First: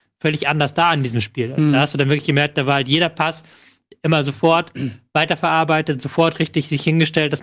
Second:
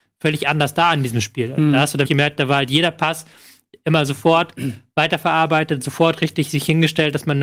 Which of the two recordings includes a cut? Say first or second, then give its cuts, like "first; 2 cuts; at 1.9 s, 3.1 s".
second; 1 cut; at 2.0 s